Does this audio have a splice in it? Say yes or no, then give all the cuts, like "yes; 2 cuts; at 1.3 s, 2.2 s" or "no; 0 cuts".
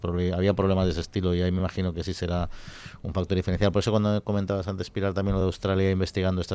no; 0 cuts